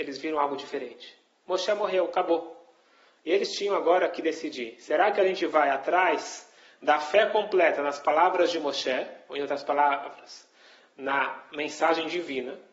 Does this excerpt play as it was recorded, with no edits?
yes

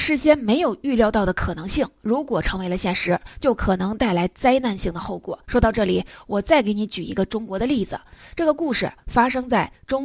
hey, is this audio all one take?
no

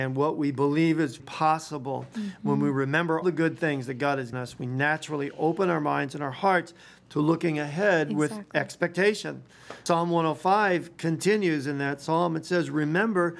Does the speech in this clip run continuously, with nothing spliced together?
no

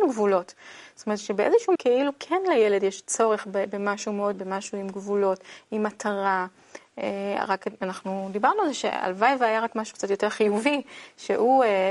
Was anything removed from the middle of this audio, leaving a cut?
yes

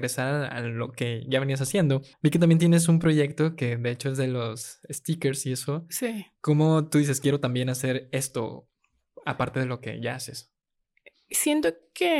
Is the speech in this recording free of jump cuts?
no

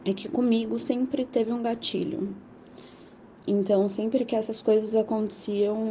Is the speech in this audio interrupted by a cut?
no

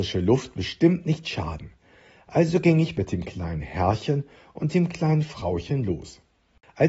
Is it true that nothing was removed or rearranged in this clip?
yes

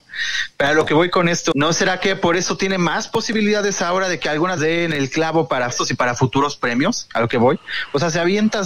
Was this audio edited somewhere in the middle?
yes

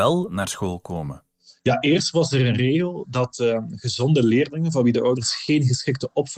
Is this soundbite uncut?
yes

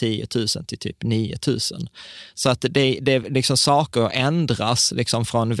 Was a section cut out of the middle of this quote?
no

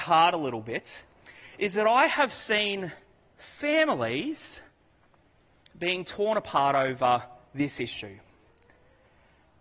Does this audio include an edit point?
no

